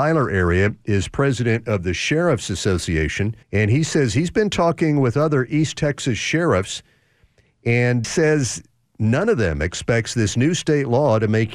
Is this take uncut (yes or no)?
no